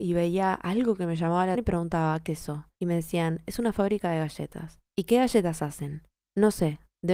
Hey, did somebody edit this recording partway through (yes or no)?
yes